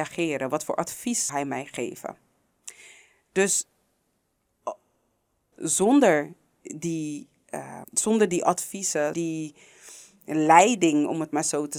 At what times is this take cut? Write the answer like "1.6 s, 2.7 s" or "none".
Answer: 1.3 s, 5.5 s, 7.8 s, 9.1 s